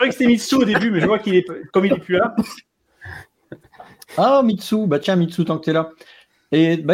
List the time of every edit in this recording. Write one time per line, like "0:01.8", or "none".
none